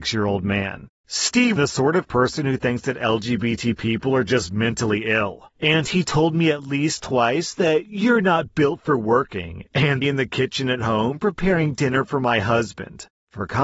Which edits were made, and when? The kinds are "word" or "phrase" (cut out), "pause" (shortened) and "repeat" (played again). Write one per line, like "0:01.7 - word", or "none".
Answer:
0:01.6 - phrase
0:10.0 - phrase